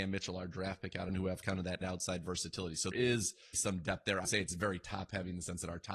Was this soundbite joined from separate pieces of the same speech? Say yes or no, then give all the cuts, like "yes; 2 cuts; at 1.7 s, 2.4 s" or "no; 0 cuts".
yes; 5 cuts; at 1.1 s, 1.8 s, 2.9 s, 3.5 s, 4.2 s